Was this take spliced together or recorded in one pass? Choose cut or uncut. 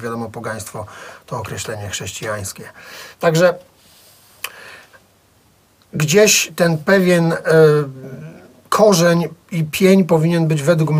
cut